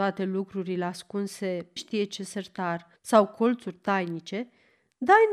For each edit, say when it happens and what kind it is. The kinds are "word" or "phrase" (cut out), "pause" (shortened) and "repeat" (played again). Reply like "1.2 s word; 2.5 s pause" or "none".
1.8 s phrase; 3.0 s pause